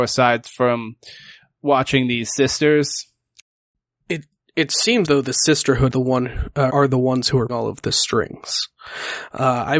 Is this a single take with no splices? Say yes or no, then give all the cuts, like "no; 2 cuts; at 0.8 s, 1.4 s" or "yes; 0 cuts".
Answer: no; 4 cuts; at 5.0 s, 5.9 s, 6.7 s, 7.5 s